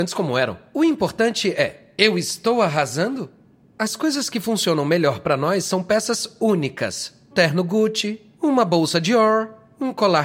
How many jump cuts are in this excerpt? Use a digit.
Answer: 1